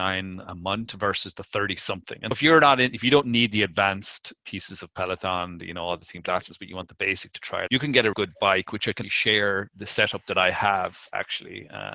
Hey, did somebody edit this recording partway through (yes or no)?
yes